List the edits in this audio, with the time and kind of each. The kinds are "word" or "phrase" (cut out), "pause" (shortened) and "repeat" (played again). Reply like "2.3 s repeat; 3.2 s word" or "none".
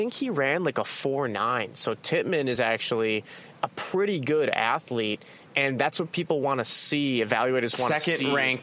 none